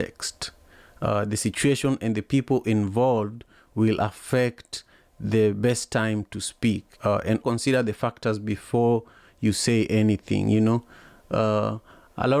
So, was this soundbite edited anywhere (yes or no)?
yes